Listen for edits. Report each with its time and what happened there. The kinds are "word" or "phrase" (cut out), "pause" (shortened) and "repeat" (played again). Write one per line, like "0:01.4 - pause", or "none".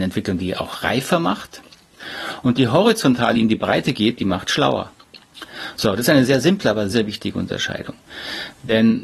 0:03.3 - word
0:06.9 - word

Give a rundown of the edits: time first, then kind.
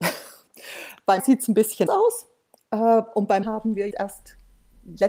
0:01.2 - word
0:01.9 - word
0:03.4 - word
0:03.9 - word

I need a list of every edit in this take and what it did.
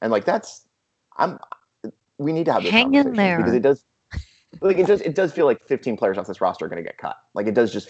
none

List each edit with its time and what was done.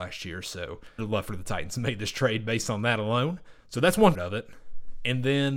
0:01.0 - word
0:03.6 - pause
0:04.1 - word

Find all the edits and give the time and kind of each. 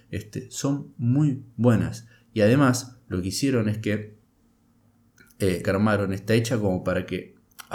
0:01.5 - word
0:05.6 - phrase

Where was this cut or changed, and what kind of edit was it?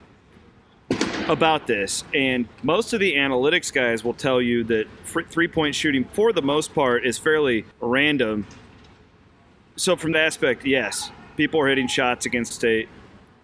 0:02.5 - pause
0:07.7 - pause
0:10.1 - word
0:12.5 - word

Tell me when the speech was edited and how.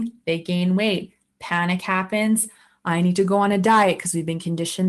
none

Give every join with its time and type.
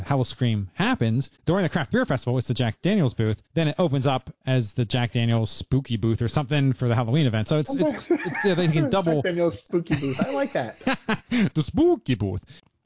0:01.4 - pause
0:03.5 - pause

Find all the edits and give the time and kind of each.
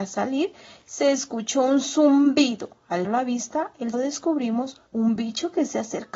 0:03.0 - word
0:03.9 - word
0:04.9 - pause

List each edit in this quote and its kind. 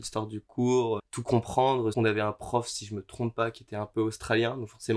0:01.0 - word
0:01.9 - word

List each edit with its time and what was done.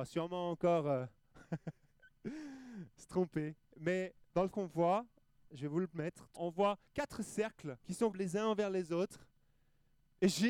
0:04.5 - word
0:06.4 - word
0:06.9 - pause
0:07.8 - pause
0:08.1 - word

